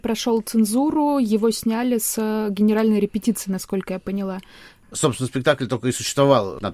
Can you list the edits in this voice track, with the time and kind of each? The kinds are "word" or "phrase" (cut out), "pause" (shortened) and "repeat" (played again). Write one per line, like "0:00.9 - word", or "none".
none